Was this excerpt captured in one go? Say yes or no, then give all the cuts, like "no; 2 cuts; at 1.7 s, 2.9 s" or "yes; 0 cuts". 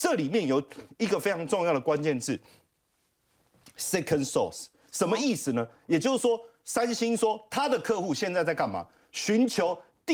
yes; 0 cuts